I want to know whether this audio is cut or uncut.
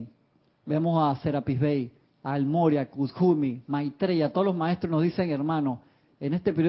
uncut